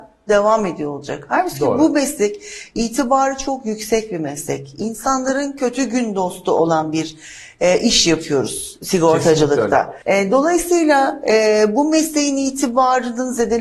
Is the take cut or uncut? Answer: cut